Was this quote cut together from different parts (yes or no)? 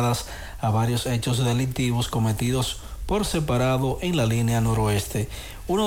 no